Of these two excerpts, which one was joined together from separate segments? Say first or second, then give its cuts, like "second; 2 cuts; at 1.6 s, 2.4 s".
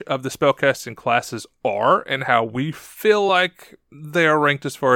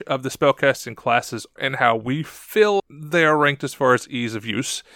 second; 2 cuts; at 1.6 s, 2.8 s